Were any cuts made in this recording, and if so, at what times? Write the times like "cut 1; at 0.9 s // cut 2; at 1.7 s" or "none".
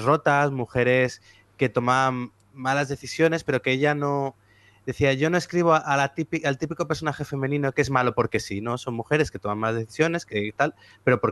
cut 1; at 10.3 s

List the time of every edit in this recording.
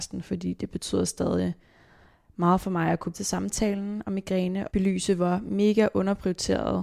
cut 1; at 3.1 s // cut 2; at 4.7 s

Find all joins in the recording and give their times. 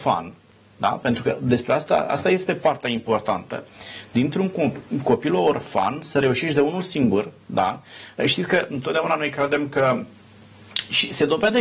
none

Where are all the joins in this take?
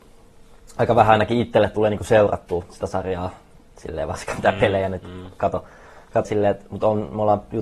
cut 1; at 6.3 s

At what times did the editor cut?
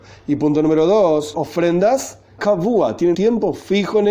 cut 1; at 1.3 s // cut 2; at 2.4 s // cut 3; at 3.1 s

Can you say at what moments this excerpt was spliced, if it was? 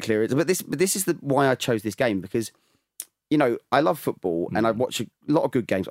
none

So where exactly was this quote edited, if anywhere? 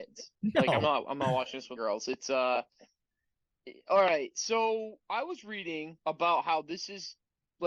cut 1; at 1.8 s // cut 2; at 5.0 s // cut 3; at 6.0 s

